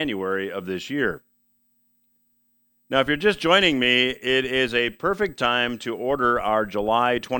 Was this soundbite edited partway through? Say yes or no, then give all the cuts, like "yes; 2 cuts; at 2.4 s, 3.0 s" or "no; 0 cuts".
no; 0 cuts